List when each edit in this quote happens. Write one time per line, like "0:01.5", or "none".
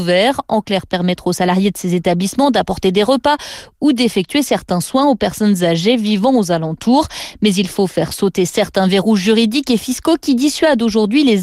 none